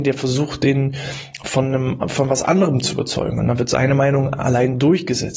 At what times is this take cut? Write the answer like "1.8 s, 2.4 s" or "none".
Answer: none